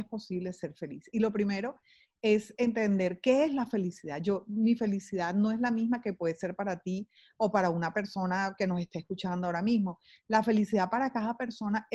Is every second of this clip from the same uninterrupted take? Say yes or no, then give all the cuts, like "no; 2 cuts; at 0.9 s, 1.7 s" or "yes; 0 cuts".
yes; 0 cuts